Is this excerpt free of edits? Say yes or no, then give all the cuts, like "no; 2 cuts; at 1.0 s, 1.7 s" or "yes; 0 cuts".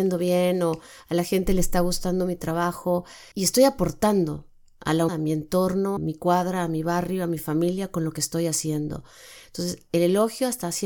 no; 3 cuts; at 3.3 s, 5.1 s, 6.0 s